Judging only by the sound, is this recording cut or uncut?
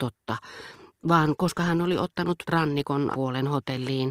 cut